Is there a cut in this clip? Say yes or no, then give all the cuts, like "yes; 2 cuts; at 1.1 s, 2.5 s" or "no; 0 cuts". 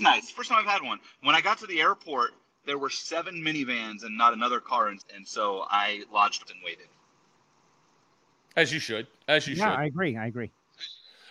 yes; 2 cuts; at 5.0 s, 6.5 s